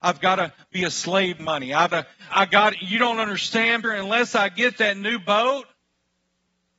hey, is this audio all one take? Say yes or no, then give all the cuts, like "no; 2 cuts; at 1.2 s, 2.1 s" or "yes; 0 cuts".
no; 4 cuts; at 1.4 s, 1.9 s, 2.3 s, 3.8 s